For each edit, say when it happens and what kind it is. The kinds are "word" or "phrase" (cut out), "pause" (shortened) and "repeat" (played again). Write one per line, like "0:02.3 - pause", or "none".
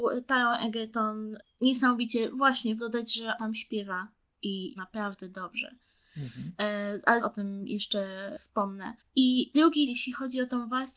0:02.8 - word
0:03.4 - word
0:04.8 - word
0:07.2 - word
0:09.5 - word
0:09.9 - word